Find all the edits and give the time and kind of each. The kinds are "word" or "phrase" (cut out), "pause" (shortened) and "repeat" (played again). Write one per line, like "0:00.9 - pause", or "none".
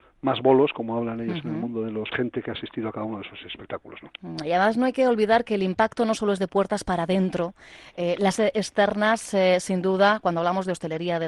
0:02.1 - phrase
0:08.4 - word